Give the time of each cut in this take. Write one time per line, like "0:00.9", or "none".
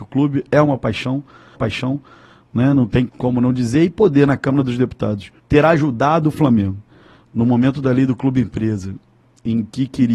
0:01.5
0:03.1
0:05.4